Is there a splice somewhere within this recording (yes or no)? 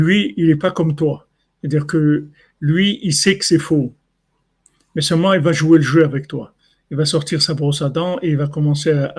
no